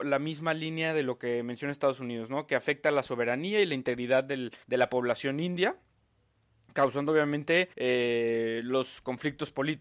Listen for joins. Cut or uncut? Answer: cut